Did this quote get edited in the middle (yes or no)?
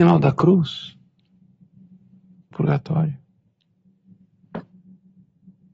yes